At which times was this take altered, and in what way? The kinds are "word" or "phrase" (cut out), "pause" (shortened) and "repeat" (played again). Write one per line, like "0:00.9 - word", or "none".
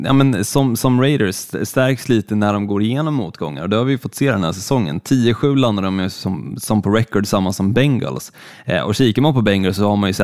none